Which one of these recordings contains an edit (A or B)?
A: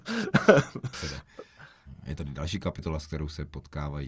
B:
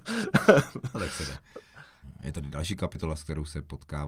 A